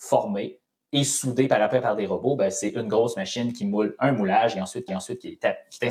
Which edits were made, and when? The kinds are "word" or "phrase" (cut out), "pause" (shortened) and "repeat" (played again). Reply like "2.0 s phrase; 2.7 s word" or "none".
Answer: 4.9 s repeat